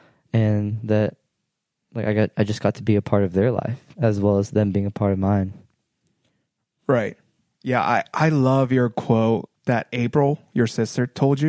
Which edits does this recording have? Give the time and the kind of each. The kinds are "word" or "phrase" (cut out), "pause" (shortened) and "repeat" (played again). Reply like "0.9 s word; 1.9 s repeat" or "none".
none